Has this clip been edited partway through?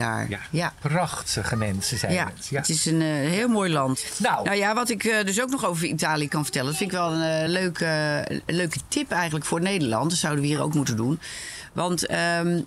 no; 0 cuts

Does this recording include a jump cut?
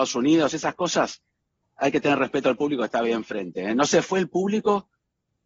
no; 0 cuts

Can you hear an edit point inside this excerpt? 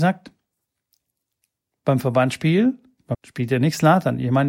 yes; 1 cut; at 3.1 s

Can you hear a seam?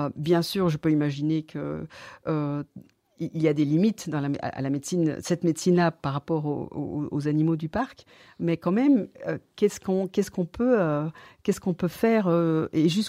no; 0 cuts

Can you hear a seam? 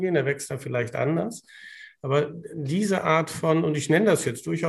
no; 0 cuts

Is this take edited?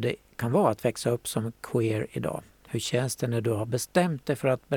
no; 0 cuts

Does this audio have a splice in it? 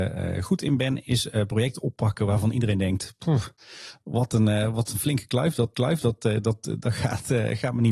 yes; 1 cut; at 5.7 s

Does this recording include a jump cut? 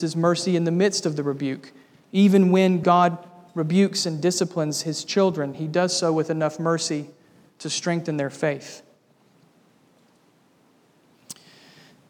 no; 0 cuts

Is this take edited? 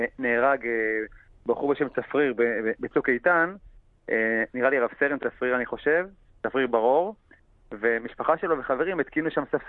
no; 0 cuts

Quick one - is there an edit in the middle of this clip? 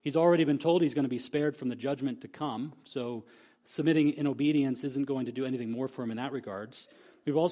no; 0 cuts

